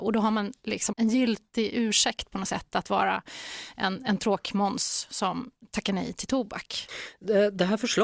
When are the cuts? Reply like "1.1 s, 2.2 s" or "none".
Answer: 0.9 s